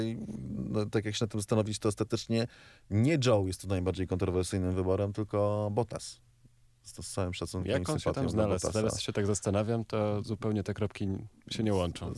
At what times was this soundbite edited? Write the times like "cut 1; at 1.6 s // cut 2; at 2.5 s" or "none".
none